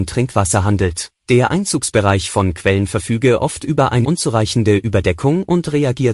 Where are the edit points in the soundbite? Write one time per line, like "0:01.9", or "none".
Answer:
0:01.2
0:04.0